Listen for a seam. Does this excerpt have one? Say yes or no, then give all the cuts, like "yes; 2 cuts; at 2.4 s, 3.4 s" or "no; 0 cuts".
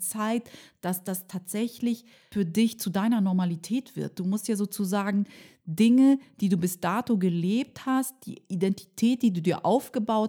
no; 0 cuts